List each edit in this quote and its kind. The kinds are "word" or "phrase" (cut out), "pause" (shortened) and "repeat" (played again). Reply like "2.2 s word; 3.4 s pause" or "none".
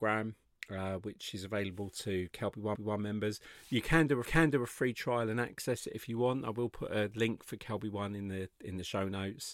2.8 s repeat; 4.3 s repeat